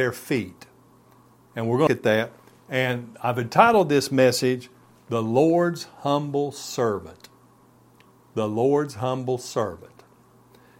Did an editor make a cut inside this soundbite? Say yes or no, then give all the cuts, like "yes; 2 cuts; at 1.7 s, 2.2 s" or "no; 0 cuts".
yes; 1 cut; at 1.9 s